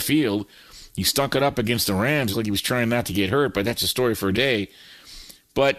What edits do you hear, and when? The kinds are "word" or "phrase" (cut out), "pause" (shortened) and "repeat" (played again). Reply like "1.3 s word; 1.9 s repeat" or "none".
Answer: 2.3 s word; 4.3 s word